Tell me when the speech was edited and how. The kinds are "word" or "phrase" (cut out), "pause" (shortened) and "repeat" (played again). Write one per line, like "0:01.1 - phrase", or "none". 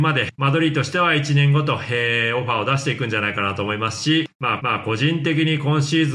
0:04.6 - repeat